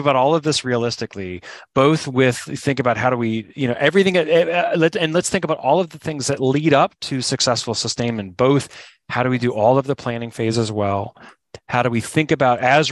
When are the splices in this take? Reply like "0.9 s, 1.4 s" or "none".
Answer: none